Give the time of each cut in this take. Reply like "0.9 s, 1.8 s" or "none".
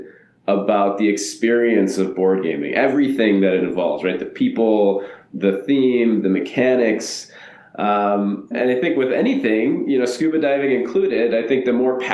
8.5 s